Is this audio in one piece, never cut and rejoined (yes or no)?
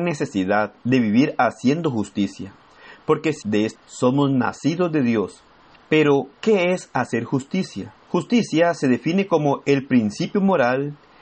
no